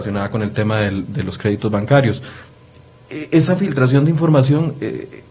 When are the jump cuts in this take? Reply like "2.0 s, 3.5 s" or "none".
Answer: none